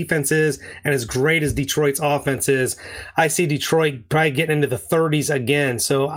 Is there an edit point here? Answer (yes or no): no